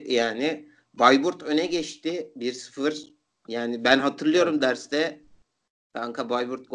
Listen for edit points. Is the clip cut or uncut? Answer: uncut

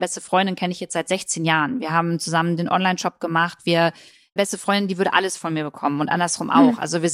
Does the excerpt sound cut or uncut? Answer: cut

